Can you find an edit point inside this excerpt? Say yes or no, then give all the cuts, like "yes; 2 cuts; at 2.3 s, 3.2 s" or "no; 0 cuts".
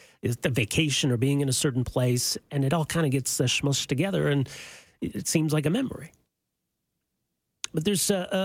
no; 0 cuts